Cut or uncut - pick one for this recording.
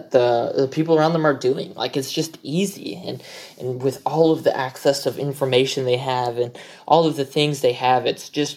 uncut